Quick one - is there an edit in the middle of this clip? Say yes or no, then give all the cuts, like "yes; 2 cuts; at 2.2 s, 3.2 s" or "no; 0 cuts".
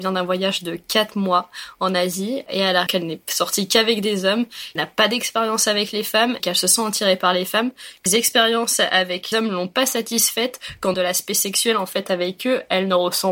yes; 6 cuts; at 2.9 s, 4.8 s, 6.4 s, 8.1 s, 9.3 s, 10.9 s